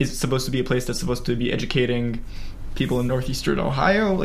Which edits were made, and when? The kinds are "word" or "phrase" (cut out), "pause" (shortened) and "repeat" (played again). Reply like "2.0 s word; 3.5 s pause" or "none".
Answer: none